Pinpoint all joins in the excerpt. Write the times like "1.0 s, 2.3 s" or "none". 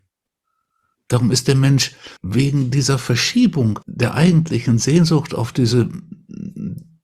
2.2 s, 3.8 s